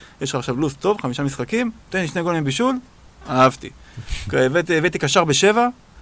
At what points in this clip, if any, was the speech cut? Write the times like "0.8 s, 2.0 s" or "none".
1.8 s